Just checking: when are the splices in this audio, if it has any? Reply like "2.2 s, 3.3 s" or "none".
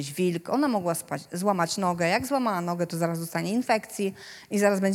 none